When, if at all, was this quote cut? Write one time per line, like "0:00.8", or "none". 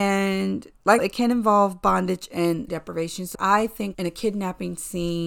0:01.0
0:02.7
0:03.3
0:03.9